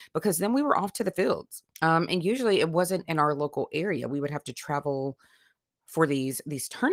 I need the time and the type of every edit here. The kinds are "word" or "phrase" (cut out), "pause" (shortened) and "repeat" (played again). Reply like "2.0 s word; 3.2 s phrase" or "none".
1.7 s pause; 3.1 s word

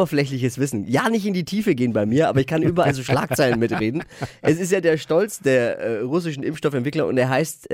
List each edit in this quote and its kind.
none

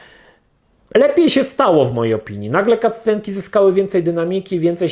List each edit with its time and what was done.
none

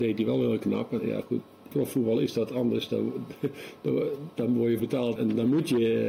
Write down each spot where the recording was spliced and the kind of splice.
1.0 s word; 1.7 s word; 4.8 s word; 5.2 s word

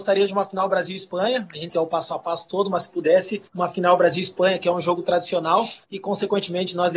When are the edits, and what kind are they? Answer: 1.7 s word; 3.5 s pause; 5.8 s pause

